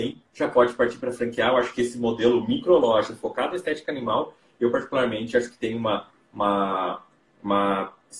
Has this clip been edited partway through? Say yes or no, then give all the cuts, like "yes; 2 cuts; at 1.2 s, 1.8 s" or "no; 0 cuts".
no; 0 cuts